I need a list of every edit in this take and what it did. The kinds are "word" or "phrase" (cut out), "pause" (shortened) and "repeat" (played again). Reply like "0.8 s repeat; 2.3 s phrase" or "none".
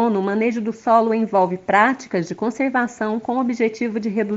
none